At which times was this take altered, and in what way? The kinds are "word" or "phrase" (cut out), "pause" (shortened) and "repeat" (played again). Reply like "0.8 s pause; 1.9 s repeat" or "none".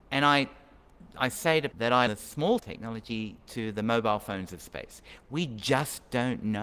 1.7 s word; 2.1 s word; 2.6 s word